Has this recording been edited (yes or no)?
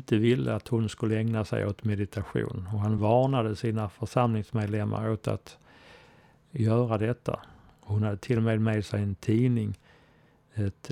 no